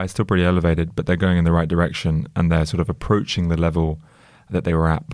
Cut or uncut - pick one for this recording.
uncut